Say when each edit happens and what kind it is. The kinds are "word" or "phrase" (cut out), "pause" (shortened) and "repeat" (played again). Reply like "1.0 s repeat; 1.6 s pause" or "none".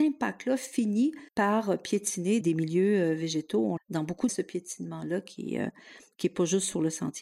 1.3 s pause; 2.4 s word; 3.8 s phrase; 4.3 s phrase